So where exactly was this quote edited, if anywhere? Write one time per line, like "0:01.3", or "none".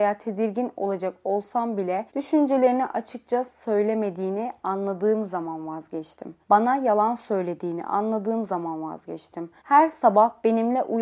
0:02.1
0:06.4
0:09.6